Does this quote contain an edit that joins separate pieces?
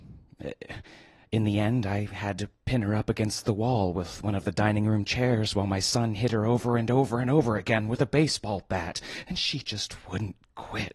no; 0 cuts

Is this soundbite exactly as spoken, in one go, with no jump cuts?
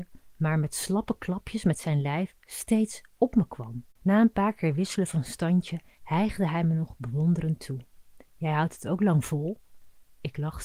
no; 1 cut; at 3.9 s

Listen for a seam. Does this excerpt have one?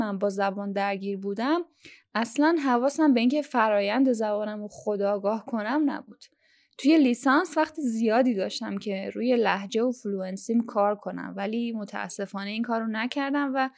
no; 0 cuts

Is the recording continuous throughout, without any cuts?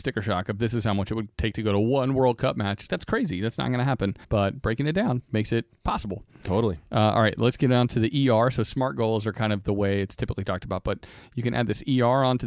no; 4 cuts; at 1.3 s, 2.9 s, 4.2 s, 5.7 s

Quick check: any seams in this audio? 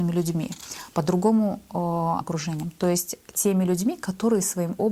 yes; 1 cut; at 2.2 s

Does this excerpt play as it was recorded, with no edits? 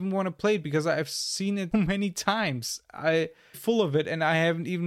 no; 2 cuts; at 1.7 s, 3.5 s

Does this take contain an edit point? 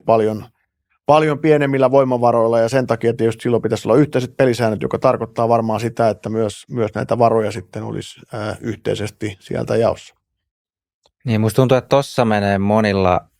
no; 0 cuts

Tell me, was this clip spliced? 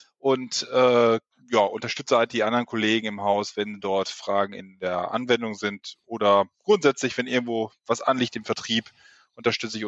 no; 0 cuts

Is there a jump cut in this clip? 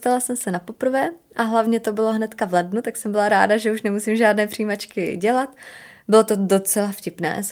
no; 0 cuts

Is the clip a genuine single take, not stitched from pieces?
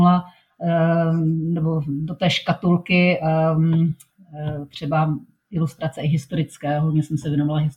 yes; 0 cuts

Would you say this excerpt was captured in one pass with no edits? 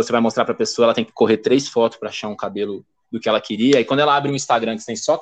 yes; 0 cuts

